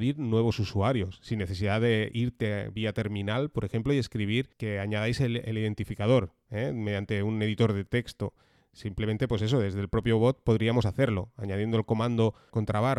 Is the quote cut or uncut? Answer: uncut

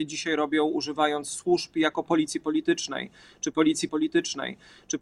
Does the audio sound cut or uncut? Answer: cut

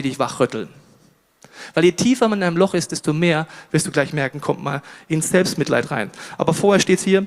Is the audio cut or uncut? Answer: uncut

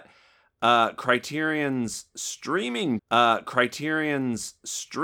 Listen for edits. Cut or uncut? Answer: cut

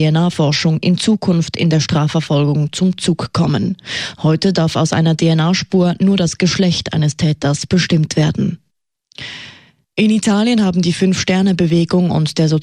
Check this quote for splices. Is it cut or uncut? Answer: uncut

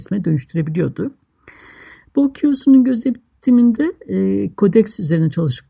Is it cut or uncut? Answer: uncut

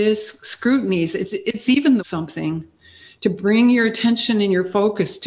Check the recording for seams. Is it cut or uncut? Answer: cut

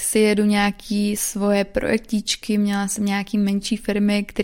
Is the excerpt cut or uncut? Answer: uncut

